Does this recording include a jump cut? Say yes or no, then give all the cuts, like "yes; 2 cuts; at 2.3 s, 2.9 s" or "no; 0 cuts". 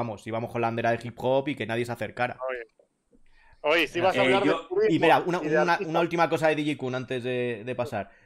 no; 0 cuts